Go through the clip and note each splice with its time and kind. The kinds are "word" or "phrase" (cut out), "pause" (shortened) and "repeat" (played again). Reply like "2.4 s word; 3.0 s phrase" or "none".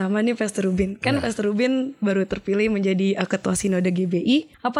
none